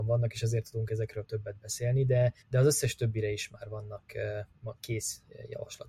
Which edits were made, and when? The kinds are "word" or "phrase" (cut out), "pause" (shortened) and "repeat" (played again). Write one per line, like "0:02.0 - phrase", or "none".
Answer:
0:02.4 - pause